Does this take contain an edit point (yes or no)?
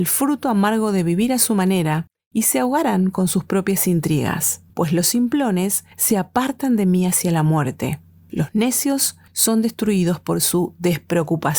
yes